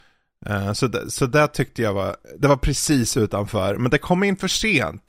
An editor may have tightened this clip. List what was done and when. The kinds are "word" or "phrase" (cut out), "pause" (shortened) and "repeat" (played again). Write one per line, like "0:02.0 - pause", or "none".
0:02.2 - pause